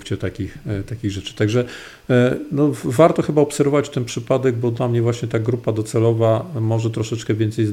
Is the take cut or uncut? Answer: uncut